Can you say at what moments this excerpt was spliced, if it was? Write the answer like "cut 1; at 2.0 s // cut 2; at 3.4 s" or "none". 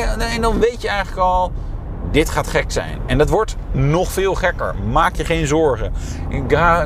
none